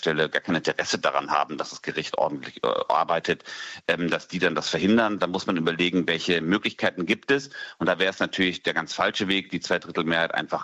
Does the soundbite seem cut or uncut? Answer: uncut